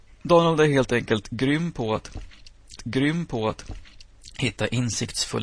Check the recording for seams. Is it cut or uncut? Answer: cut